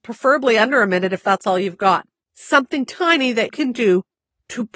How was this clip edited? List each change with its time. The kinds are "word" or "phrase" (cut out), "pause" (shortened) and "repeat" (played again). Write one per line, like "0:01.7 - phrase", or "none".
0:02.9 - word
0:03.5 - word